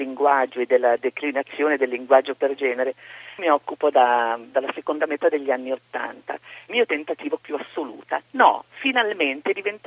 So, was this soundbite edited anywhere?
yes; 4 cuts; at 3.4 s, 4.5 s, 6.7 s, 7.4 s

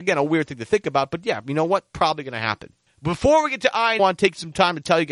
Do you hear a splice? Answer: yes; 1 cut; at 4.0 s

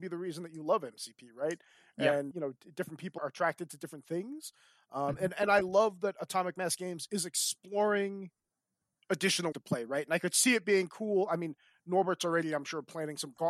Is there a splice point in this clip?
yes; 3 cuts; at 2.3 s, 3.2 s, 9.5 s

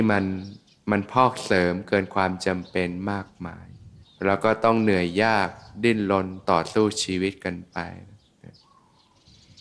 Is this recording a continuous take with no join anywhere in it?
no; 1 cut; at 4.0 s

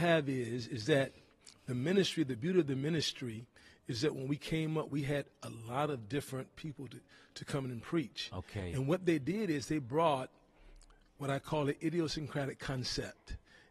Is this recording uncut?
yes; 0 cuts

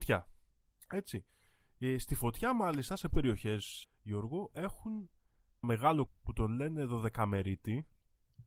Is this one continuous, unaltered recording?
no; 4 cuts; at 3.1 s, 3.8 s, 5.6 s, 6.1 s

